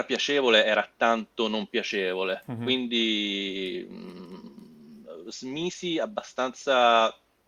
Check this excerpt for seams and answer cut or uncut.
uncut